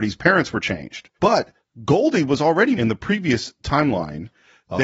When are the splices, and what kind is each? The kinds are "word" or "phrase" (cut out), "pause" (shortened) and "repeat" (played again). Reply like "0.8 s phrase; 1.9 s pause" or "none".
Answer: 1.1 s pause; 2.7 s word